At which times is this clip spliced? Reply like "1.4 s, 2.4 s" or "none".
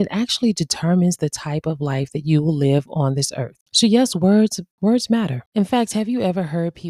none